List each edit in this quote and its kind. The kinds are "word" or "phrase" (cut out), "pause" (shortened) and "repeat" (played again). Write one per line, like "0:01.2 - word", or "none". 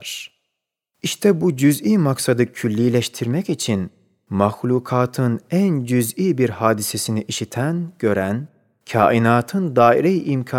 none